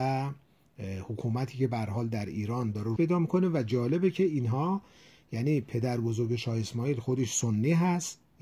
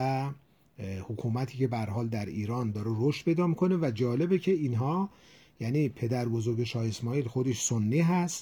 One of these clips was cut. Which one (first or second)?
first